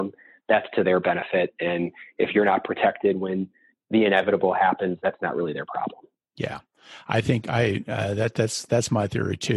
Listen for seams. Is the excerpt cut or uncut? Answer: uncut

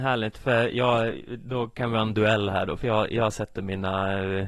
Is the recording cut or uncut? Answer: uncut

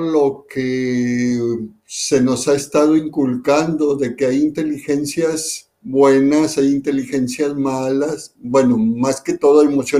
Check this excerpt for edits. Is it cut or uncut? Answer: uncut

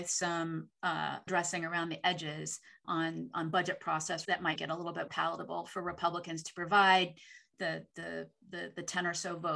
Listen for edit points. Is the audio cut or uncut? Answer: cut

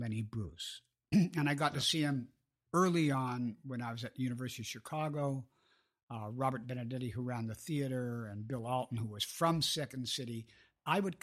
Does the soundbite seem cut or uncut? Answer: uncut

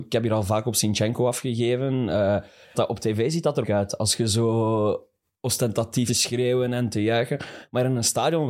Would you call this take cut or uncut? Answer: cut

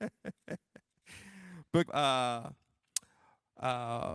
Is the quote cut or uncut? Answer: cut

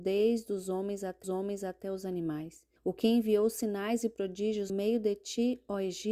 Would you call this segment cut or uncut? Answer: cut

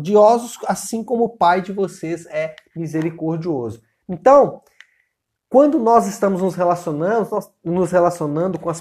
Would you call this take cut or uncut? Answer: uncut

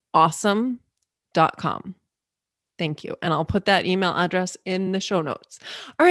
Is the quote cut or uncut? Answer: uncut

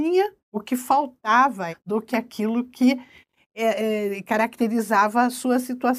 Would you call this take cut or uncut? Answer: cut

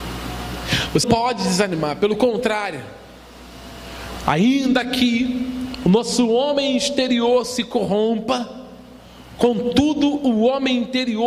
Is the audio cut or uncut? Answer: cut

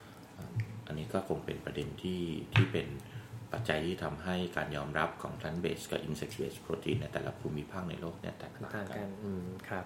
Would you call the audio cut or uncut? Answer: uncut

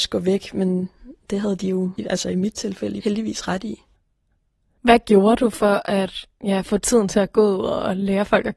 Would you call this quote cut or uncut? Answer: uncut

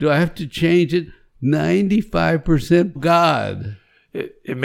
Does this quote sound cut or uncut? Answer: cut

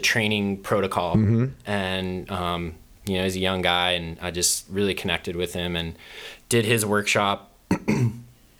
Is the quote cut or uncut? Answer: uncut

